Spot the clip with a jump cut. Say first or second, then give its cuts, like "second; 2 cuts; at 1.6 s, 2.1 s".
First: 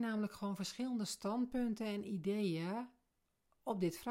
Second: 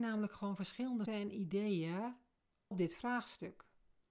second; 2 cuts; at 1.1 s, 2.7 s